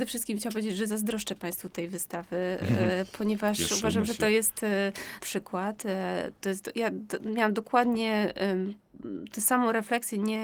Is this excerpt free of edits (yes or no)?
no